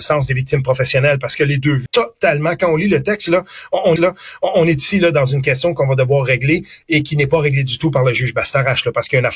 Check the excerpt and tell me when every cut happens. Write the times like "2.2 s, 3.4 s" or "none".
1.9 s, 4.0 s